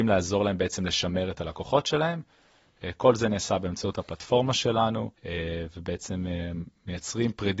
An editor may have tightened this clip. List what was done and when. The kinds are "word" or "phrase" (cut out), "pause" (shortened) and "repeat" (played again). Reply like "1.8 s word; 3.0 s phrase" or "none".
5.1 s pause